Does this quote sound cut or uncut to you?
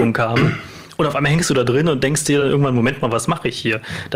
uncut